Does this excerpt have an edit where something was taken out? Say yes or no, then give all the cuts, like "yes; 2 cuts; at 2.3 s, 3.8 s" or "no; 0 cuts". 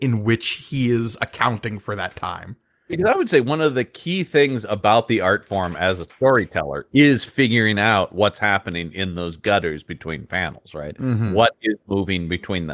no; 0 cuts